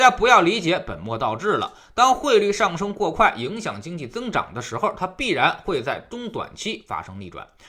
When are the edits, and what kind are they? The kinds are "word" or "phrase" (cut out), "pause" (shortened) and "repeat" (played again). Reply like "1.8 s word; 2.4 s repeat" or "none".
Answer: none